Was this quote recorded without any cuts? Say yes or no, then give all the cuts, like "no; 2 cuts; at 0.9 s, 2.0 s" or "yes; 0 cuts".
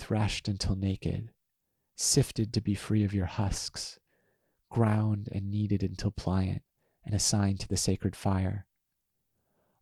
yes; 0 cuts